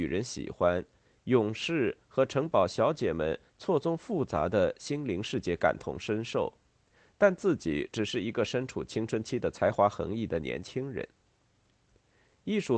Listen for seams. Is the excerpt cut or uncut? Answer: uncut